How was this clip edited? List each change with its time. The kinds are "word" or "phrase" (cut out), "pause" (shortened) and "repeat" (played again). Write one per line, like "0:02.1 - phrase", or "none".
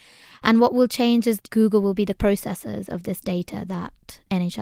0:01.4 - word